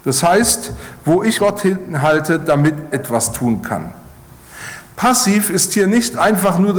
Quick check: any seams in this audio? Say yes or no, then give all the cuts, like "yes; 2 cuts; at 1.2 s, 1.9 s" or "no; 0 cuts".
yes; 2 cuts; at 1.4 s, 2.9 s